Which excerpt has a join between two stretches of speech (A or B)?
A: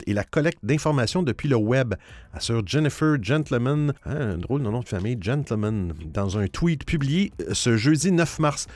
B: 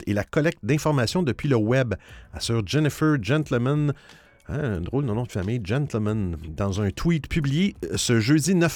A